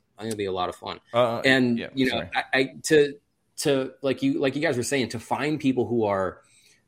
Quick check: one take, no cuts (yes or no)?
yes